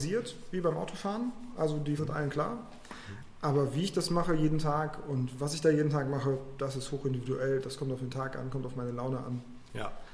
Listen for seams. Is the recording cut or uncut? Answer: cut